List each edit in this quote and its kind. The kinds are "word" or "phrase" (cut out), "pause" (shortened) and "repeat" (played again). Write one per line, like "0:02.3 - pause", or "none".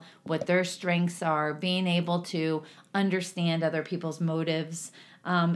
none

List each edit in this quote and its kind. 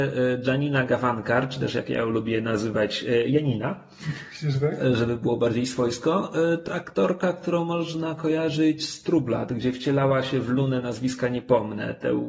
0:06.7 - word

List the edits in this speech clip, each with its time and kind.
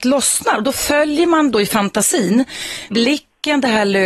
0:02.9 - word

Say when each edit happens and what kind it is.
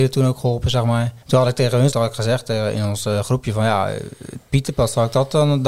0:01.2 - pause
0:01.9 - word

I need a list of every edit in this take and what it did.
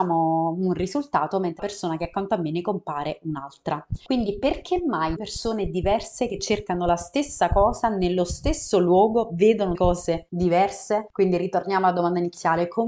0:01.6 - word
0:05.2 - word
0:09.7 - word

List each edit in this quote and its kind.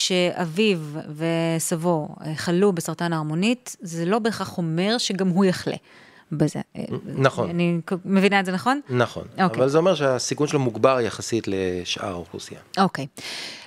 none

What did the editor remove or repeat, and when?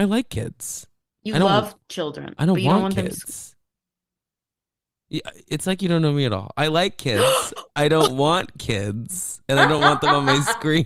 none

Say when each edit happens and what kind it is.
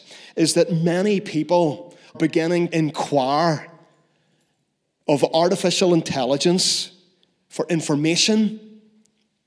0:02.1 - word
0:02.7 - word

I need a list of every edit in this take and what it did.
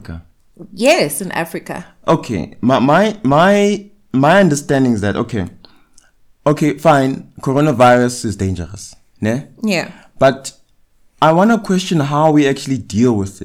none

